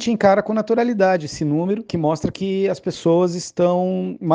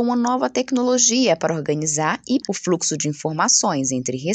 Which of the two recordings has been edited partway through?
second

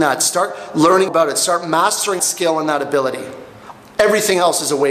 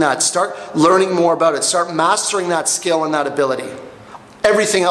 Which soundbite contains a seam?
first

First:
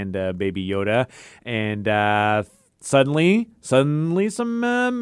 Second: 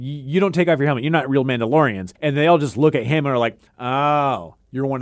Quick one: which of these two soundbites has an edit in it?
second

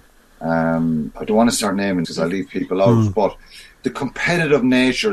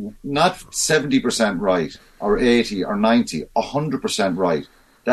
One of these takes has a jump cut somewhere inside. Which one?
first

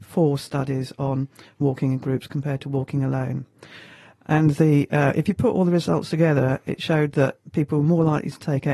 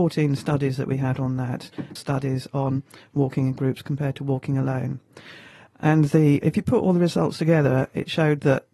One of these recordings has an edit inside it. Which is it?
second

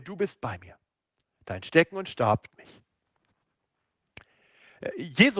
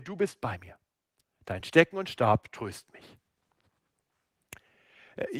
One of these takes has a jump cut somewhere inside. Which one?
first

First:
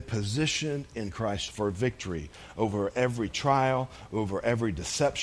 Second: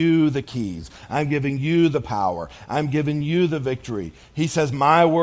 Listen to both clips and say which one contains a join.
first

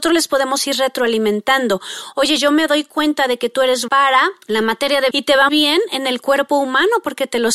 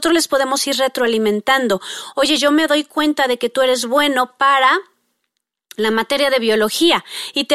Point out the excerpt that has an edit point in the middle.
first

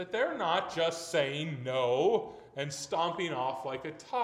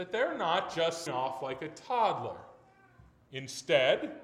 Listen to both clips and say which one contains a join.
second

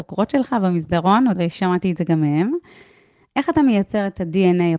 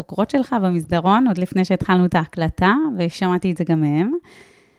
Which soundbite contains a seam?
first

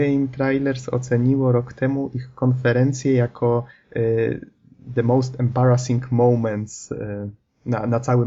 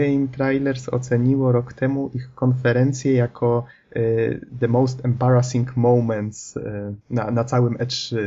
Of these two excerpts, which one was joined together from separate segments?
second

